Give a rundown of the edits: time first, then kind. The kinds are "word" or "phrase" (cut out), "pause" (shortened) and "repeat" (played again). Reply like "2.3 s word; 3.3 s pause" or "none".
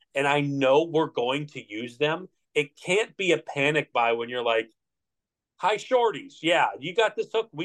none